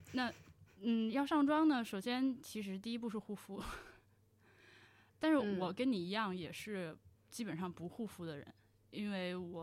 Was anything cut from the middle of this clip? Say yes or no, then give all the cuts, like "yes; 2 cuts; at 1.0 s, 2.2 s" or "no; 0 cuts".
yes; 1 cut; at 5.1 s